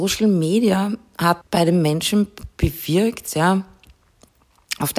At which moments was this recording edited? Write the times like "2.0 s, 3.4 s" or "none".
1.4 s